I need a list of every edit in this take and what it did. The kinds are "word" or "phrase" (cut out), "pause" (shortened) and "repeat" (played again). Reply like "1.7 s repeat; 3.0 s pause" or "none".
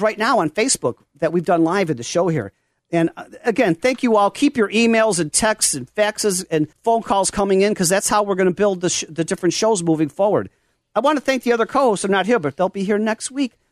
6.7 s pause

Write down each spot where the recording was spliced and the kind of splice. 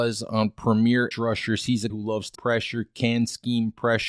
1.1 s word; 1.9 s word; 2.3 s word

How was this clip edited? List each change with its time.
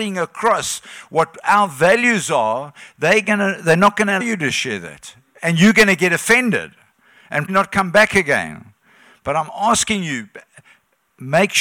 4.2 s word; 7.5 s word

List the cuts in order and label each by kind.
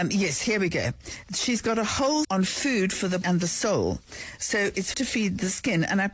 2.2 s word; 3.2 s word; 4.9 s word

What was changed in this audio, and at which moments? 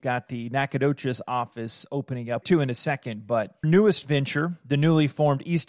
2.4 s phrase; 3.6 s word

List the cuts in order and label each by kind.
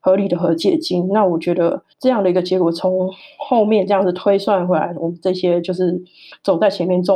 1.9 s pause

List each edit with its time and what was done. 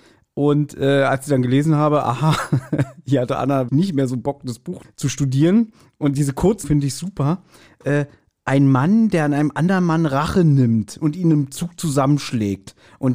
3.7 s word; 4.8 s word; 6.1 s word; 6.6 s word

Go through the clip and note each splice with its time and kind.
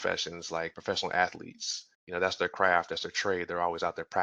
1.9 s pause

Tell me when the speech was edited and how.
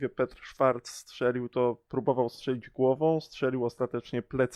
none

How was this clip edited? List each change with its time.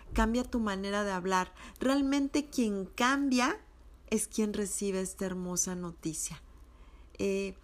none

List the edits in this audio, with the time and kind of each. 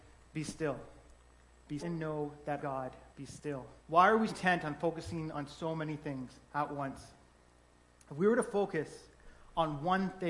1.8 s word; 2.6 s phrase; 3.1 s pause; 3.8 s pause; 4.3 s word; 6.4 s pause

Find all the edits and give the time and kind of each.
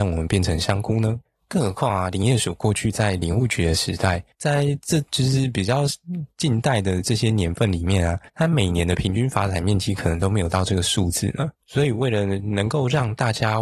1.3 s pause; 4.3 s pause; 5.1 s pause; 8.3 s pause; 11.6 s pause

